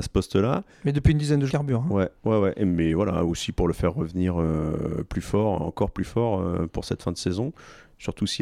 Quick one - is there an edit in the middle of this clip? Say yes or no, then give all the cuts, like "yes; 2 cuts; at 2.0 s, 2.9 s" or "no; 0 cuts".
yes; 1 cut; at 1.5 s